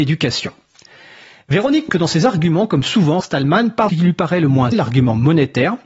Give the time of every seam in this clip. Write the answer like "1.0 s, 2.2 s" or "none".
1.9 s, 3.2 s, 3.9 s, 4.7 s